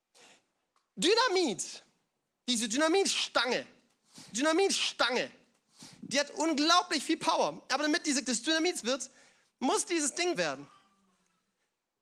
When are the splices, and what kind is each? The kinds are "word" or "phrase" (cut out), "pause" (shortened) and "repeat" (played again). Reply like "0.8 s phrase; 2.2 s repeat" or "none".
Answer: 4.3 s repeat; 8.2 s word; 8.8 s word; 10.3 s word